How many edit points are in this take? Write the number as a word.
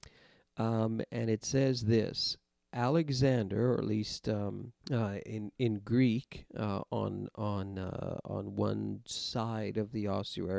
one